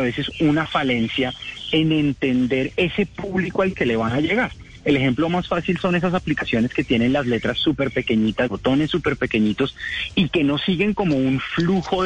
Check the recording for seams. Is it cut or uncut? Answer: cut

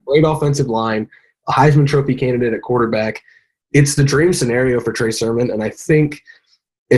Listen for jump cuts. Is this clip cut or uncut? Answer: uncut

